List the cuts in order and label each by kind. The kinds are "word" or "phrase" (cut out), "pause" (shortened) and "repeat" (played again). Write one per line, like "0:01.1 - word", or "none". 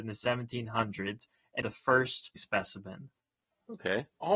0:01.6 - phrase
0:02.4 - word